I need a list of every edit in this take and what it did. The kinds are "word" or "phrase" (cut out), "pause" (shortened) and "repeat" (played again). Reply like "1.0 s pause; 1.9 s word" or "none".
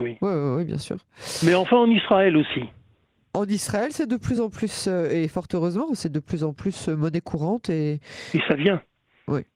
none